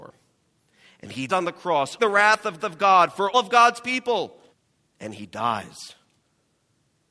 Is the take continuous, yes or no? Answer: no